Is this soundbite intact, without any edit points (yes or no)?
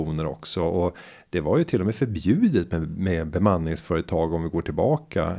yes